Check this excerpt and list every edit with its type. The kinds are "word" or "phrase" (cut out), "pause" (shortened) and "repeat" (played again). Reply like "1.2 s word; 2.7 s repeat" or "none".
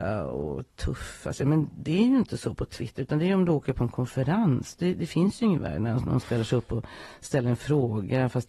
none